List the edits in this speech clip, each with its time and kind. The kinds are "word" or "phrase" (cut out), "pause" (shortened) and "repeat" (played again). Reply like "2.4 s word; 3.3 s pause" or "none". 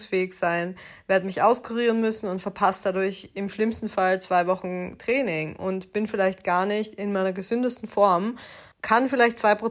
8.7 s pause